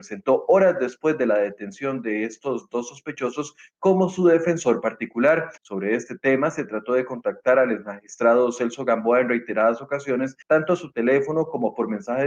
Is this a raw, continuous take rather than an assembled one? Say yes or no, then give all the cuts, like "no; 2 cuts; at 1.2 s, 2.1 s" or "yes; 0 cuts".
no; 2 cuts; at 5.6 s, 10.4 s